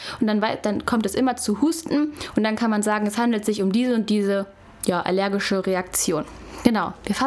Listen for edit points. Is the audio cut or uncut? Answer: uncut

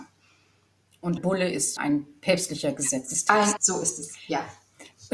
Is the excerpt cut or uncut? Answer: cut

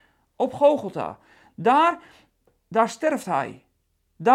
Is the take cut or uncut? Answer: uncut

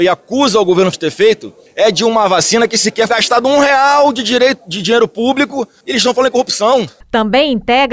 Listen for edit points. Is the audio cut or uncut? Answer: cut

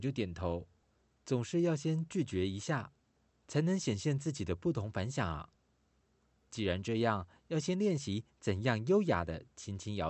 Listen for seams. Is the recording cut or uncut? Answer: uncut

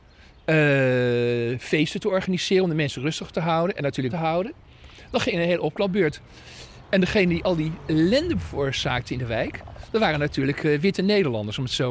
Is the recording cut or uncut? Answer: cut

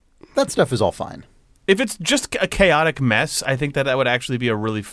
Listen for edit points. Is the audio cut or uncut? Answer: uncut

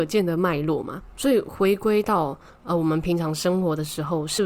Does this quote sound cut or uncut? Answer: uncut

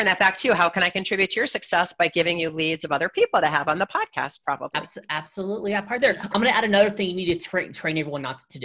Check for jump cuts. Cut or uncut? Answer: uncut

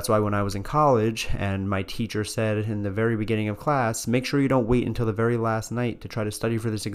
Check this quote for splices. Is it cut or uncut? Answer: uncut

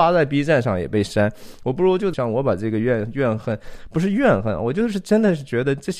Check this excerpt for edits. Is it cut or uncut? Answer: cut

